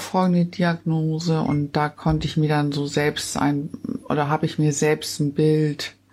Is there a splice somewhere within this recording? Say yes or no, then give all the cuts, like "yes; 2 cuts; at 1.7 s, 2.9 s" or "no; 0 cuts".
no; 0 cuts